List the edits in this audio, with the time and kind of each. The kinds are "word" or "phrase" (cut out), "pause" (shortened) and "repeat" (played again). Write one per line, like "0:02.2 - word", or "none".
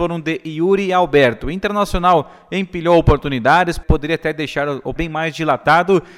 0:05.0 - word